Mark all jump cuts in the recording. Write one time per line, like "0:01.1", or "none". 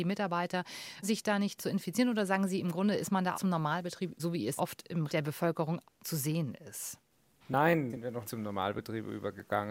0:01.0
0:01.6
0:03.3
0:04.1
0:04.6
0:05.1
0:05.8
0:07.9
0:08.2